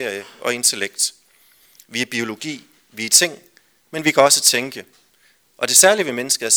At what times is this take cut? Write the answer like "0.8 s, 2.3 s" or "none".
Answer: none